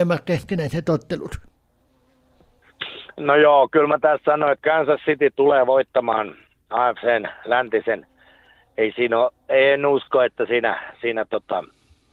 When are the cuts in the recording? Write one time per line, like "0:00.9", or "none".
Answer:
none